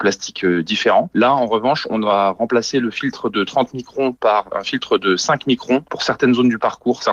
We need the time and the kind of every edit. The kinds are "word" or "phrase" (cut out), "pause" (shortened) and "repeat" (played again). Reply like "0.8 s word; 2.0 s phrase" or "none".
none